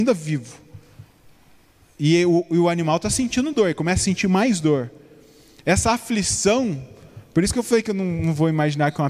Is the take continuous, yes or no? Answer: yes